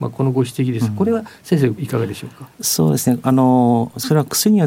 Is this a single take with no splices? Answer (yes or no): no